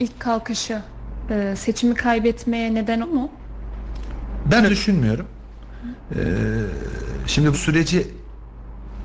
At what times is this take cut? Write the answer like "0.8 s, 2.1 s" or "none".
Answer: 3.0 s, 4.7 s, 7.5 s